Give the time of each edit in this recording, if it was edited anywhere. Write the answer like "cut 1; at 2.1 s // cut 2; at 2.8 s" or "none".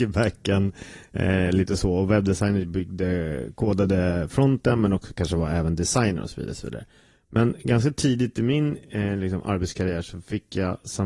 none

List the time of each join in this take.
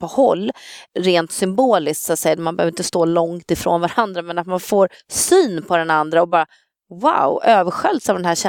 none

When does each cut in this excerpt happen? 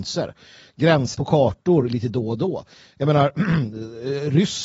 cut 1; at 1.1 s

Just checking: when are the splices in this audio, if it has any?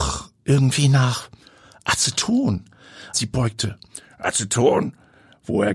cut 1; at 3.1 s

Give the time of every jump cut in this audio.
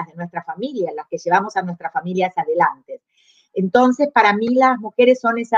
none

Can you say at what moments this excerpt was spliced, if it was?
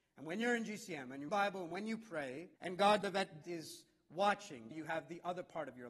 cut 1; at 1.3 s // cut 2; at 2.6 s // cut 3; at 3.0 s // cut 4; at 3.4 s // cut 5; at 4.7 s

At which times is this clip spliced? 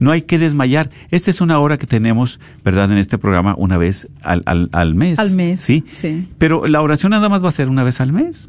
none

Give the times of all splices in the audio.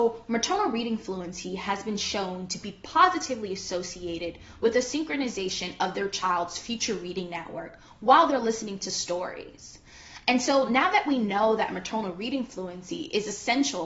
none

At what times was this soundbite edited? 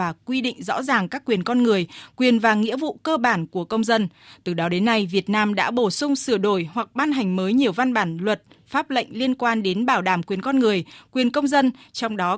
none

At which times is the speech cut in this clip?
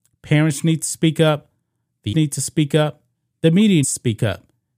cut 1; at 2.1 s // cut 2; at 3.8 s

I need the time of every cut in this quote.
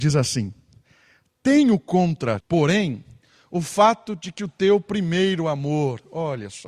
cut 1; at 2.4 s // cut 2; at 4.4 s

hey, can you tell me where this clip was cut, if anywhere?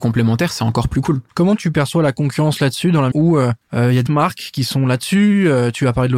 cut 1; at 1.3 s // cut 2; at 3.1 s // cut 3; at 3.6 s // cut 4; at 4.1 s

